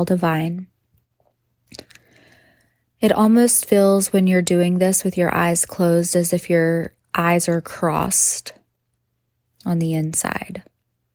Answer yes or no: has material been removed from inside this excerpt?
no